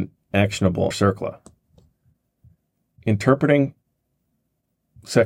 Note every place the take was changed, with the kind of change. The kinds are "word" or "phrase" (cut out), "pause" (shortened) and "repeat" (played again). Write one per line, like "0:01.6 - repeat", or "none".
0:00.9 - word